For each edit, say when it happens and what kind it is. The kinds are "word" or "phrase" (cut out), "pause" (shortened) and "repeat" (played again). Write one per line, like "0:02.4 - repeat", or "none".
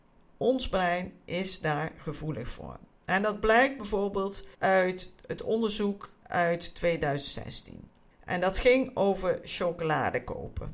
0:04.5 - pause
0:08.1 - pause